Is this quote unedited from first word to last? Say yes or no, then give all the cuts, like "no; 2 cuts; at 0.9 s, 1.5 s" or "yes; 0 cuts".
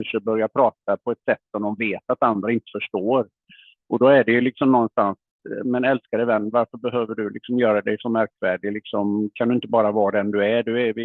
yes; 0 cuts